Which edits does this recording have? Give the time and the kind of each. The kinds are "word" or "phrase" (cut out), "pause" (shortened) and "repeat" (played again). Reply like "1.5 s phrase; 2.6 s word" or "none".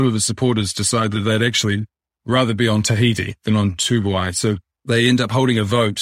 none